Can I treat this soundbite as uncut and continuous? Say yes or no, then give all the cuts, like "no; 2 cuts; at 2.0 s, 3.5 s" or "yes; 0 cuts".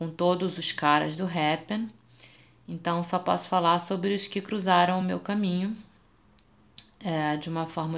yes; 0 cuts